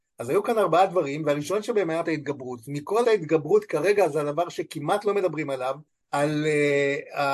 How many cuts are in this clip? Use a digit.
3